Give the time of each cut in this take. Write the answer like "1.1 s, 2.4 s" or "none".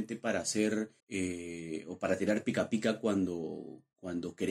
1.0 s